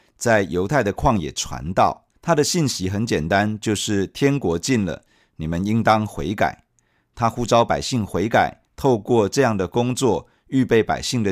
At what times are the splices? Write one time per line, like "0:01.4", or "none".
0:02.2